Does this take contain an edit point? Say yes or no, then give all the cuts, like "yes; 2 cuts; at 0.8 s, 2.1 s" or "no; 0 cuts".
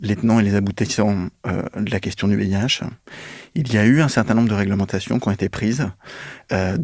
no; 0 cuts